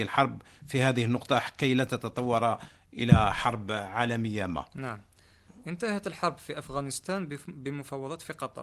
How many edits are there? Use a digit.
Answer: 0